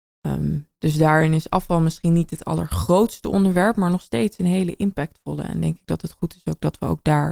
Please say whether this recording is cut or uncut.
uncut